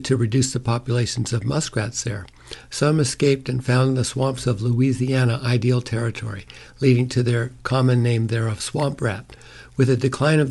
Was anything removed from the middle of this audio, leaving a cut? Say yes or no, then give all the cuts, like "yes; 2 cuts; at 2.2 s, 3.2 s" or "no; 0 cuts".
no; 0 cuts